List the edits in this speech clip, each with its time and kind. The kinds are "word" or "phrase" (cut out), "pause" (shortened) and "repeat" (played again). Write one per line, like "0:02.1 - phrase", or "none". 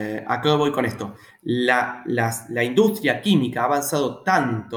none